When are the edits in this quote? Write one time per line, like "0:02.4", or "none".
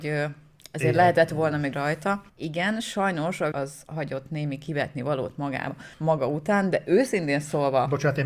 0:01.7
0:02.3
0:03.5
0:05.9